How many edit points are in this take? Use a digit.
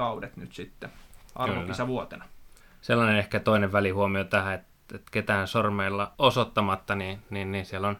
2